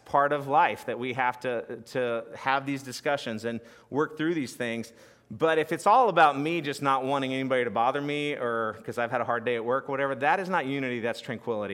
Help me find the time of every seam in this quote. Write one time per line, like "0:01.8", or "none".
none